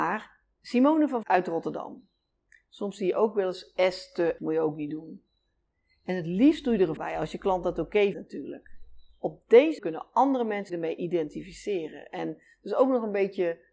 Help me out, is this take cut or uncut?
cut